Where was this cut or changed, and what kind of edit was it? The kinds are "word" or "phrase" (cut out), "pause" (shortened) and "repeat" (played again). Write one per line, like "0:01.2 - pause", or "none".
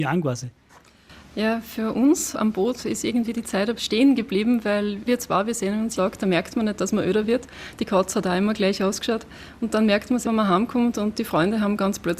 0:02.3 - word
0:03.8 - word
0:05.1 - word
0:06.0 - word
0:10.2 - word